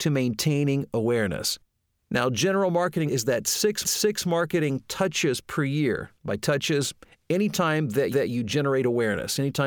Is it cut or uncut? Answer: cut